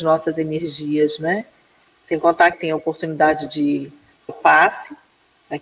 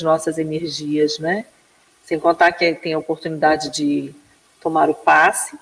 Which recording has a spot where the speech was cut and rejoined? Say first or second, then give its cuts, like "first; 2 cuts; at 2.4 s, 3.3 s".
first; 2 cuts; at 2.5 s, 4.3 s